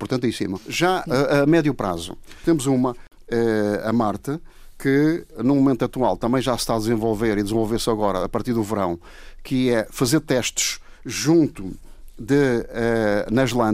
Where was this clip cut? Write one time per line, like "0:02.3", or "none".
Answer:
none